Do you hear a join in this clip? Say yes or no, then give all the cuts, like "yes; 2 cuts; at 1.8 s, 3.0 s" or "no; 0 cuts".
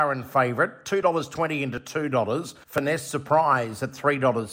yes; 1 cut; at 2.6 s